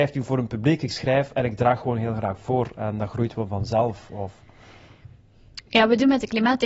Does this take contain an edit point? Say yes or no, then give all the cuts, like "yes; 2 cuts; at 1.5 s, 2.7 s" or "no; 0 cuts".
no; 0 cuts